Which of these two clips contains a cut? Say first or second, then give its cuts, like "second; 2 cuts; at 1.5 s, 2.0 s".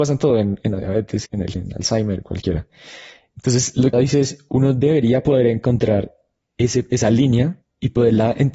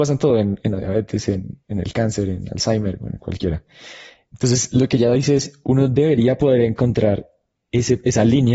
first; 4 cuts; at 1.2 s, 1.5 s, 2.2 s, 3.9 s